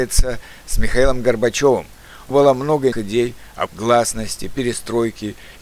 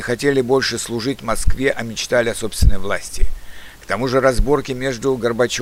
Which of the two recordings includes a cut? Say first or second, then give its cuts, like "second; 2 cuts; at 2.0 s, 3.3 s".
first; 3 cuts; at 2.3 s, 2.9 s, 3.7 s